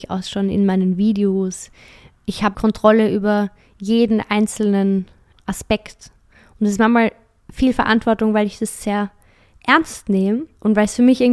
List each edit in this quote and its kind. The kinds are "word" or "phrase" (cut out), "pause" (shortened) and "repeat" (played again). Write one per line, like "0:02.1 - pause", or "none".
0:02.5 - word